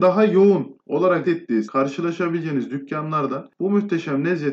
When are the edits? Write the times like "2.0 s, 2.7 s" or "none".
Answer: 1.2 s, 1.7 s